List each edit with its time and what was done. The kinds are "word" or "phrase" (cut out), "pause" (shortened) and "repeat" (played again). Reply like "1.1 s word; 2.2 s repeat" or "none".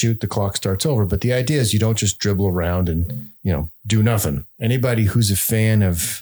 3.4 s pause; 3.8 s pause; 4.5 s pause